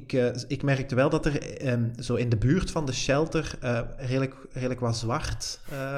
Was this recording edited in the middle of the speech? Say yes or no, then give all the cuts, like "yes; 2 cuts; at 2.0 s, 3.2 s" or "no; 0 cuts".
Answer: no; 0 cuts